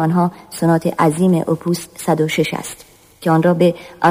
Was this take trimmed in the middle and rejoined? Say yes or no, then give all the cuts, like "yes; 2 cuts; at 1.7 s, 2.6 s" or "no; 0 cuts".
no; 0 cuts